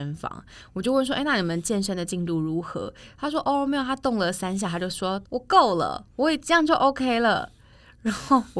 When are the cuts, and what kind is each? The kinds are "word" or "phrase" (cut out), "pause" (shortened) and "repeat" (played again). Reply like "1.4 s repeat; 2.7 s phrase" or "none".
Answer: 5.2 s pause